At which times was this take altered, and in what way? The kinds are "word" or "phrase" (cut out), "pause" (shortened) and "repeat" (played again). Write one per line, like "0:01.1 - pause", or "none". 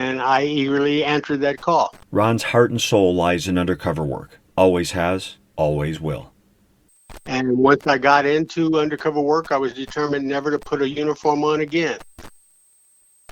0:02.0 - pause
0:04.5 - pause
0:05.5 - pause